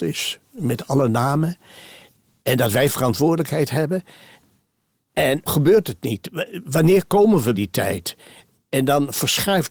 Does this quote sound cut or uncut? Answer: cut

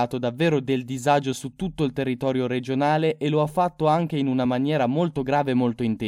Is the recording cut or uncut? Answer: uncut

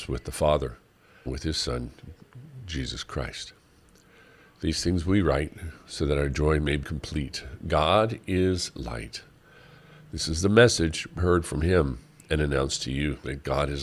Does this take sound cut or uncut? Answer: cut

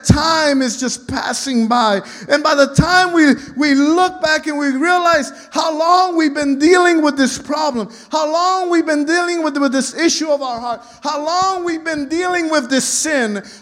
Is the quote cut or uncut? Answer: uncut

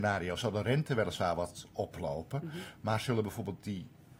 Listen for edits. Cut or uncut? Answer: uncut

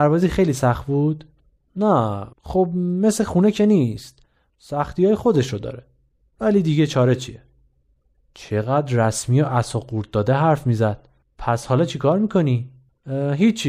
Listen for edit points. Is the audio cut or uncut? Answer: cut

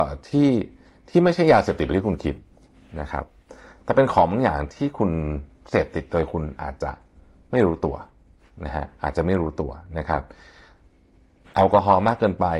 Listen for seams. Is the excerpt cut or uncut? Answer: uncut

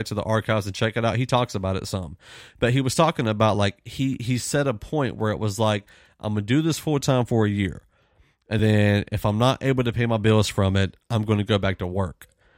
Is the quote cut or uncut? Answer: uncut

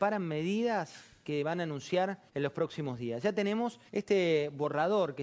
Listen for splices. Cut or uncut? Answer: cut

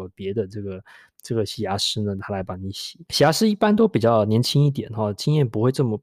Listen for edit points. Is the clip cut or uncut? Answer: cut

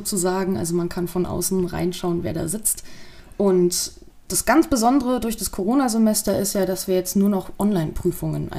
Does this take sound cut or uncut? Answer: uncut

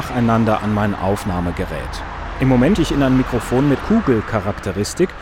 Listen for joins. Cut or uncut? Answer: cut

